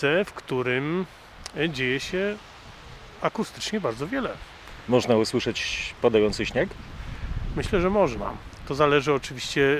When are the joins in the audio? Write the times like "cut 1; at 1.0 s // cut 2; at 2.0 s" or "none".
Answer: none